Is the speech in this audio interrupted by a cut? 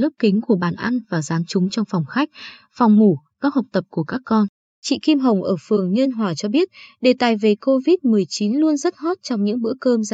no; 0 cuts

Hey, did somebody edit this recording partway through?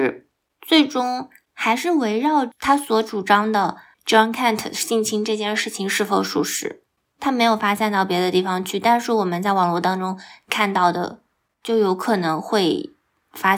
no; 0 cuts

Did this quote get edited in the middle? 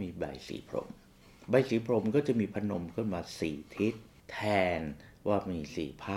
yes; 1 cut; at 4.2 s

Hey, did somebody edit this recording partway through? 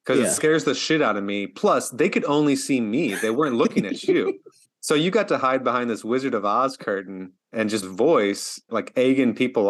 yes; 4 cuts; at 4.6 s, 7.4 s, 7.8 s, 8.7 s

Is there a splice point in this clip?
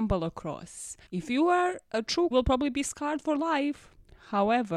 yes; 2 cuts; at 1.1 s, 2.3 s

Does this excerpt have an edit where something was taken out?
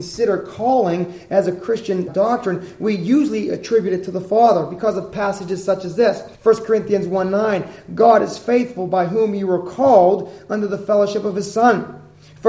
yes; 2 cuts; at 2.1 s, 6.3 s

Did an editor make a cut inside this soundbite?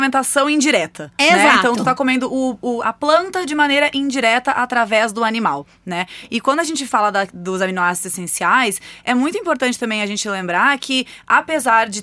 no; 0 cuts

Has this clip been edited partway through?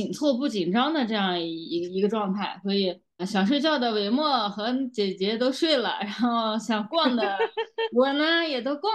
yes; 1 cut; at 3.2 s

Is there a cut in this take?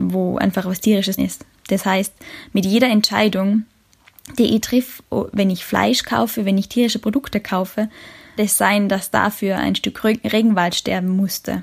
yes; 2 cuts; at 1.2 s, 8.4 s

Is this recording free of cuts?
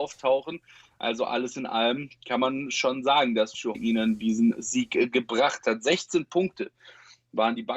no; 1 cut; at 3.7 s

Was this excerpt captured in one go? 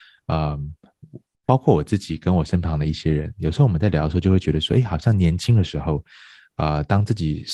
yes; 0 cuts

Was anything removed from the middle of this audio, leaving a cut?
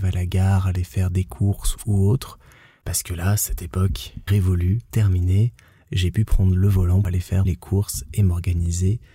yes; 4 cuts; at 4.3 s, 4.9 s, 7.0 s, 7.4 s

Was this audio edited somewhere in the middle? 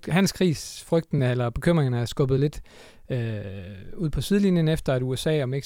no; 0 cuts

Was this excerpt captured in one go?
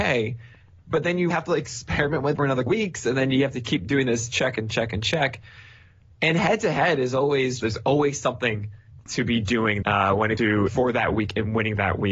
no; 7 cuts; at 1.3 s, 2.4 s, 2.7 s, 7.6 s, 9.8 s, 10.4 s, 10.7 s

